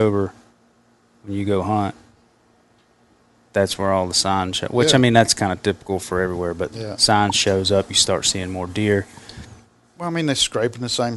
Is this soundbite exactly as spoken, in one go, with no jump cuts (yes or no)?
yes